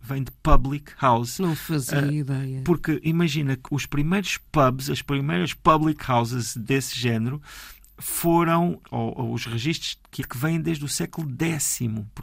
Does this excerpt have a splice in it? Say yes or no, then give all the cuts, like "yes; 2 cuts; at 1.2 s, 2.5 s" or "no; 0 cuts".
yes; 2 cuts; at 3.6 s, 10.2 s